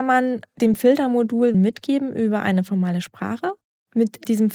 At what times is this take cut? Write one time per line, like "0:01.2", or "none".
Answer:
0:01.5